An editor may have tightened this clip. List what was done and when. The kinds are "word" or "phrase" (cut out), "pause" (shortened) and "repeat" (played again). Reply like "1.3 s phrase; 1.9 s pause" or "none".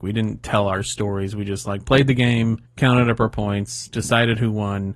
2.6 s pause